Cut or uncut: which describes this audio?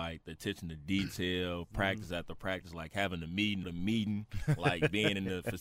cut